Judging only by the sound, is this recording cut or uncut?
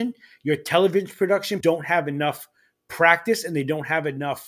cut